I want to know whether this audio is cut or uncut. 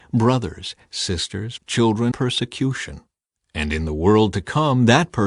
cut